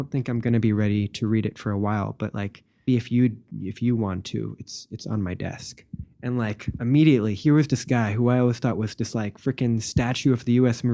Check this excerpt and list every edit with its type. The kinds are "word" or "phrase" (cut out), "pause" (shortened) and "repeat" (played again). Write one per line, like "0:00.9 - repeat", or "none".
0:02.9 - word